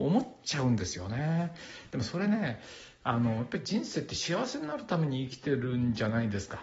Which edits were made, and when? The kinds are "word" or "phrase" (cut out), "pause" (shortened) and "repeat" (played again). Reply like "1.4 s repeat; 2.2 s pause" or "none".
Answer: none